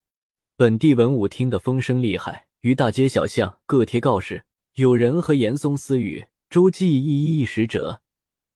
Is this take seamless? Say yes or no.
no